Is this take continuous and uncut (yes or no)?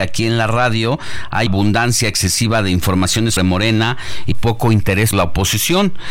no